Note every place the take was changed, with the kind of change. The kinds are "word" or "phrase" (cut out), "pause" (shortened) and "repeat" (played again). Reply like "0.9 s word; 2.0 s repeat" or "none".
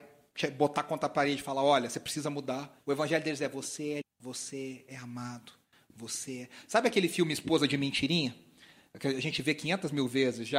2.8 s pause; 4.0 s word